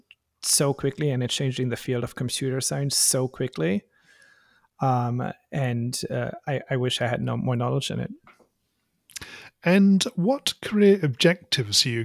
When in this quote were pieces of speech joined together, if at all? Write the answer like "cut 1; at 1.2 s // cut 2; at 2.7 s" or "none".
none